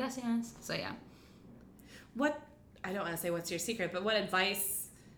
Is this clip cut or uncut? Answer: uncut